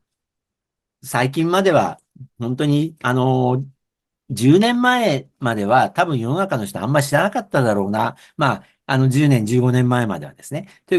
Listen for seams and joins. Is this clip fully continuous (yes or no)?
no